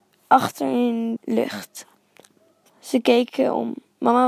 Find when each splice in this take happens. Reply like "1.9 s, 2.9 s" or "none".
1.2 s